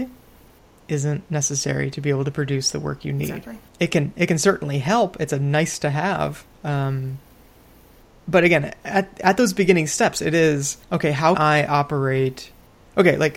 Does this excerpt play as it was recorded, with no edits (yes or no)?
no